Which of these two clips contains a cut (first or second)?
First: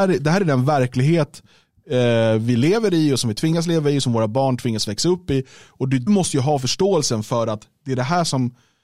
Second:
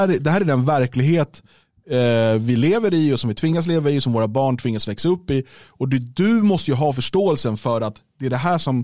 first